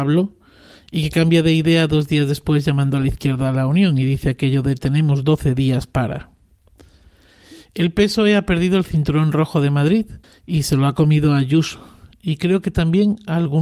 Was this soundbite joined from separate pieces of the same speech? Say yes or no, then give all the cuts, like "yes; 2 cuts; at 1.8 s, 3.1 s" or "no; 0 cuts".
yes; 1 cut; at 10.2 s